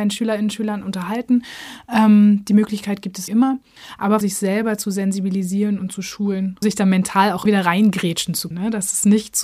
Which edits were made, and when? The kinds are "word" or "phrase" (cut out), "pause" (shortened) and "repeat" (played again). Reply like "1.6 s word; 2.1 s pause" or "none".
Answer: 3.3 s word; 4.2 s word; 6.6 s word; 7.5 s word; 8.5 s word